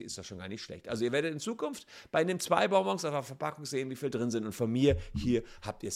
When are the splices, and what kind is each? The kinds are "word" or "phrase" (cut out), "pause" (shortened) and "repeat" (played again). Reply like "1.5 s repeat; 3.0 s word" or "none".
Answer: none